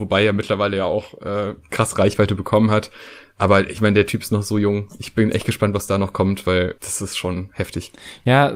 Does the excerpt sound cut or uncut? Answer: uncut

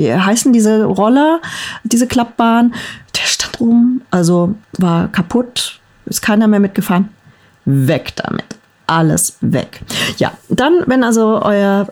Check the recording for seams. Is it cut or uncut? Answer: cut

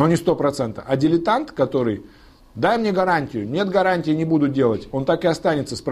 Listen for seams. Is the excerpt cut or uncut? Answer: uncut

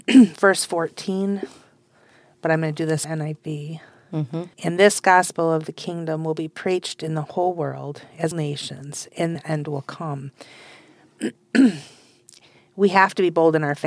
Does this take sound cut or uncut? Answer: cut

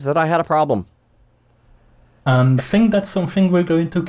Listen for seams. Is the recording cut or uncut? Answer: cut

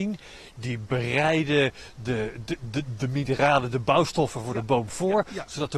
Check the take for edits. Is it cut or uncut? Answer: uncut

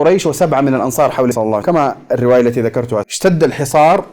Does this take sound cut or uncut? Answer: cut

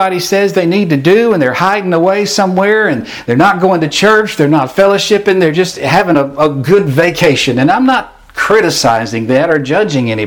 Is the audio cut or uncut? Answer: uncut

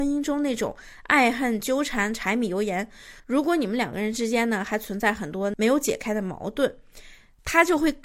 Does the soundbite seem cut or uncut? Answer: cut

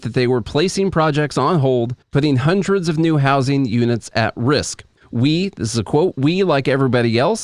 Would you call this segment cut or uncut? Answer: cut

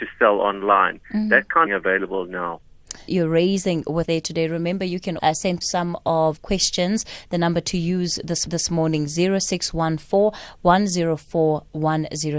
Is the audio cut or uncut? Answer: cut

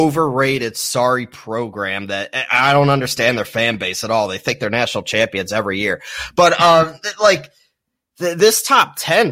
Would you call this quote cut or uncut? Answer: uncut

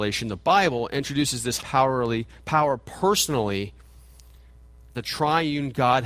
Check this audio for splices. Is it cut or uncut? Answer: cut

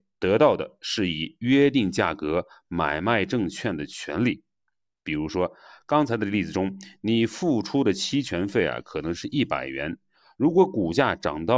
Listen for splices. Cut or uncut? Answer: uncut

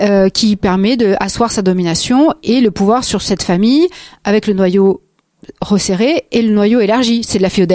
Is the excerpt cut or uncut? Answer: uncut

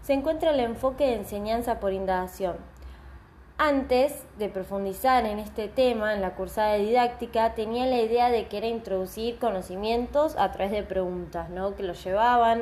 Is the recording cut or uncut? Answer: uncut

